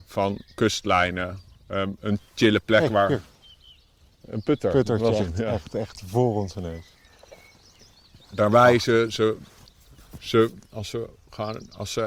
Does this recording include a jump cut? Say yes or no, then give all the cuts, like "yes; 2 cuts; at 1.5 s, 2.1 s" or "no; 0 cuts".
no; 0 cuts